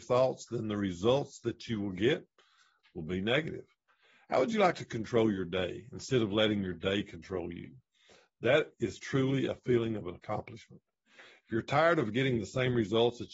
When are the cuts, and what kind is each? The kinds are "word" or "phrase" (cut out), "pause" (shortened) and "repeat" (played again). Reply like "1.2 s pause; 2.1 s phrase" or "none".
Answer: none